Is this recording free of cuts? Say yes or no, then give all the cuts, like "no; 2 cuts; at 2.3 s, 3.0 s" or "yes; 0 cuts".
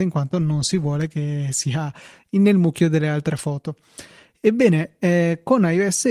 yes; 0 cuts